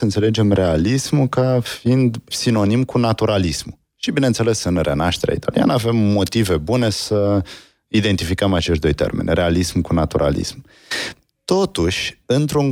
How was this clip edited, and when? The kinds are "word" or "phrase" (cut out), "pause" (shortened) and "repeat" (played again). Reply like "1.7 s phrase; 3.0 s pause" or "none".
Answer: 2.3 s word